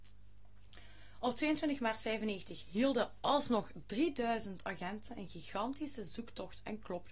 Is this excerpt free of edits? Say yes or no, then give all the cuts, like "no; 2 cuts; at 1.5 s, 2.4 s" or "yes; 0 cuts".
yes; 0 cuts